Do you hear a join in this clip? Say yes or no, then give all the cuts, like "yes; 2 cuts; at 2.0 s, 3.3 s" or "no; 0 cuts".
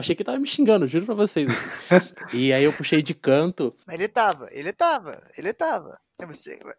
no; 0 cuts